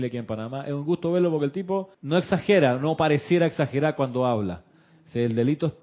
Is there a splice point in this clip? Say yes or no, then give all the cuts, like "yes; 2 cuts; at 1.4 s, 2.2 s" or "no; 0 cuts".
yes; 1 cut; at 1.9 s